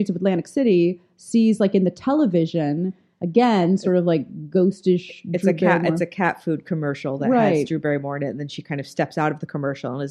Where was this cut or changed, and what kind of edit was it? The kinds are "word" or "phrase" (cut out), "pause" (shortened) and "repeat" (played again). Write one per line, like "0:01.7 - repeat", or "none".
none